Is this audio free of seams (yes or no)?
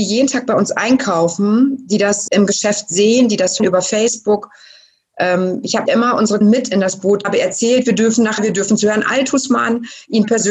no